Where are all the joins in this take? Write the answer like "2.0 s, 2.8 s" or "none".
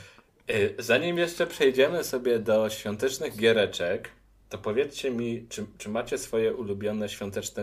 none